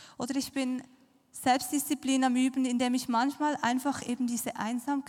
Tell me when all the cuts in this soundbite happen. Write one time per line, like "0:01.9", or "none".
none